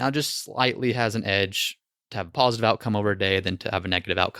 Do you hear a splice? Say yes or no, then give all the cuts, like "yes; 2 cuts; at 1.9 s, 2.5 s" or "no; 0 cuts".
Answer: no; 0 cuts